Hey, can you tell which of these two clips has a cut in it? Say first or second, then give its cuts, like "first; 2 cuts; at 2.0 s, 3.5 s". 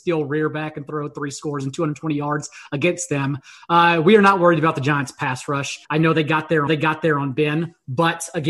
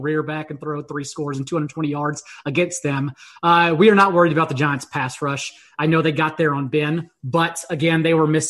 first; 2 cuts; at 5.8 s, 6.7 s